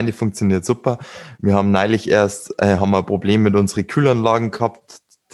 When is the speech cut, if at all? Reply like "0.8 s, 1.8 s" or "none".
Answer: none